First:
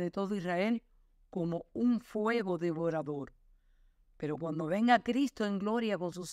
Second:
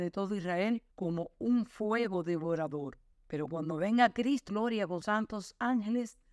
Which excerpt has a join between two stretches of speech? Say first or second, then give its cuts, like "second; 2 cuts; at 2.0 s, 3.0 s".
second; 4 cuts; at 0.9 s, 3.1 s, 4.5 s, 5.0 s